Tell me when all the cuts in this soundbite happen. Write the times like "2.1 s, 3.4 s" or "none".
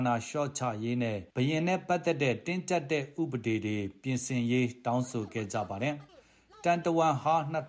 1.3 s, 6.1 s